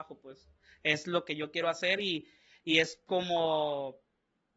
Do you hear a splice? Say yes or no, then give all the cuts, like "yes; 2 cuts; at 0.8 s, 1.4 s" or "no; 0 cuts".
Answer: no; 0 cuts